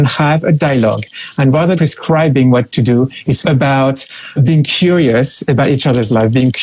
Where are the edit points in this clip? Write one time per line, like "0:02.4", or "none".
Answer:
0:01.7
0:03.4
0:04.4